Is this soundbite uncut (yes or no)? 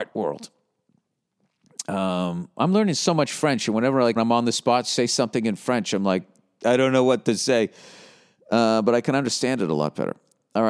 no